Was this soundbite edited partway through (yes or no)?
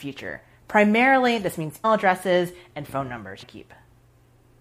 yes